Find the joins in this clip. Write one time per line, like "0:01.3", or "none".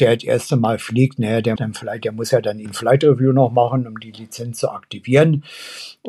0:01.6
0:02.7